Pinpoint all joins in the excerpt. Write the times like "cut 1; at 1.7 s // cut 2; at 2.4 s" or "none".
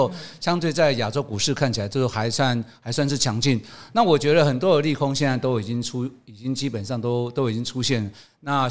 none

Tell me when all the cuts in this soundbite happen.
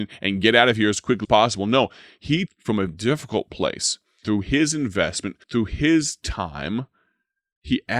cut 1; at 1.2 s // cut 2; at 2.5 s // cut 3; at 2.9 s // cut 4; at 4.2 s // cut 5; at 5.4 s

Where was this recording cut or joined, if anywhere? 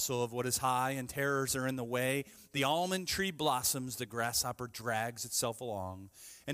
none

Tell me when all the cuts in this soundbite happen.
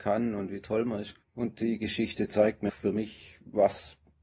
cut 1; at 1.2 s // cut 2; at 2.7 s

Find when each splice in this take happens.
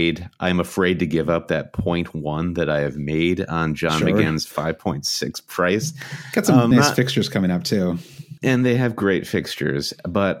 cut 1; at 6.7 s // cut 2; at 8.4 s

